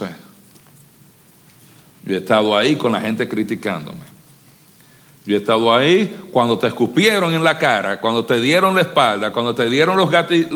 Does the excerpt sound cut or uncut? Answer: uncut